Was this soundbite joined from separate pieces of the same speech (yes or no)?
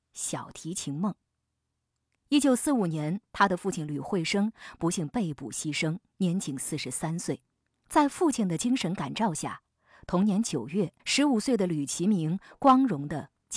yes